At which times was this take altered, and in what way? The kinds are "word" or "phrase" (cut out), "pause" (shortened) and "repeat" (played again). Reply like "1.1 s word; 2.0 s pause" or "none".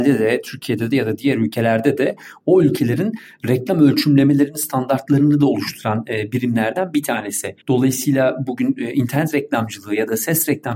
7.6 s pause

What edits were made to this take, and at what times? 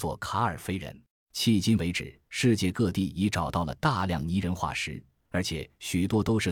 1.1 s pause; 2.3 s pause

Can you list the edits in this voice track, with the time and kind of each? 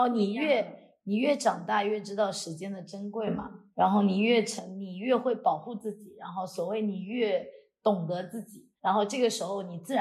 8.8 s pause

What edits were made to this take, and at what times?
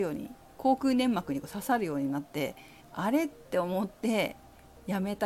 2.8 s pause

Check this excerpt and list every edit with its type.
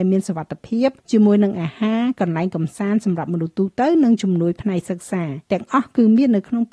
1.0 s pause; 5.4 s pause

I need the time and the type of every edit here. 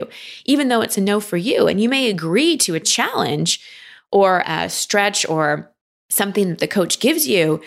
none

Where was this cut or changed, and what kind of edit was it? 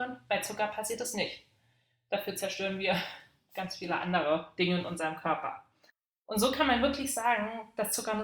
none

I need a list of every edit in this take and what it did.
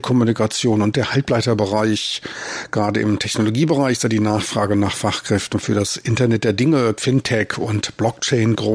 7.0 s phrase

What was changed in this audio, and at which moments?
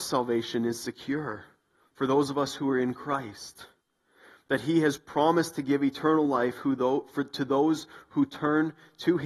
none

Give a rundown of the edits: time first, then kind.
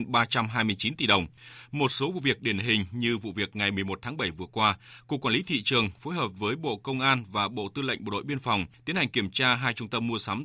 none

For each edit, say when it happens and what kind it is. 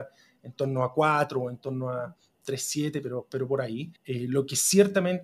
4.0 s pause

